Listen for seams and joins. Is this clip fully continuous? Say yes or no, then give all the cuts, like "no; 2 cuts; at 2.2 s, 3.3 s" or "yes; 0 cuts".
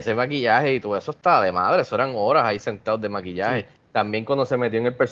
yes; 0 cuts